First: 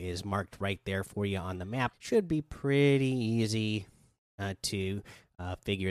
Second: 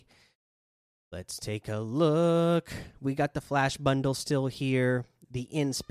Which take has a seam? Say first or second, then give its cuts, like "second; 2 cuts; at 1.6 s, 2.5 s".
first; 1 cut; at 1.9 s